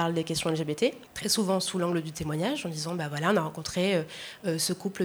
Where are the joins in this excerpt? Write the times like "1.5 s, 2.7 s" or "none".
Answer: 1.1 s